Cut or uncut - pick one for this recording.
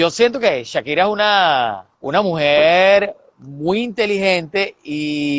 cut